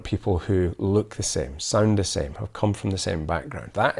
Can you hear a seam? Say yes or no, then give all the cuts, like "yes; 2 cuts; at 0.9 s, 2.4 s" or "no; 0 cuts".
no; 0 cuts